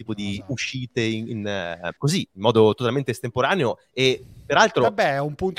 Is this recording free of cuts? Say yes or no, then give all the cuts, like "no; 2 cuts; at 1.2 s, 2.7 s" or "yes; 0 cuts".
no; 1 cut; at 2.0 s